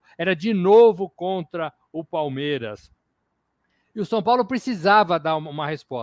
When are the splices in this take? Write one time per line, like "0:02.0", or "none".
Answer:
none